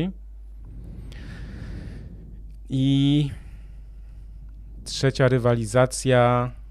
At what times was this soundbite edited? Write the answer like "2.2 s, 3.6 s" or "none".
none